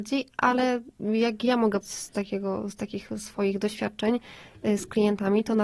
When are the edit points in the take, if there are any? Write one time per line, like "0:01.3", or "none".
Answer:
0:01.8